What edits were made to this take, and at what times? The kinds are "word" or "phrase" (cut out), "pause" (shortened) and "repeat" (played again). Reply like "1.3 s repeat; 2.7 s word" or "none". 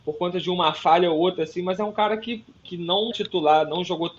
3.1 s word